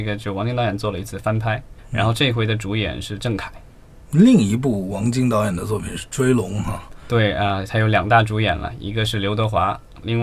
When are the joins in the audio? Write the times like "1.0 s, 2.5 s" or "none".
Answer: none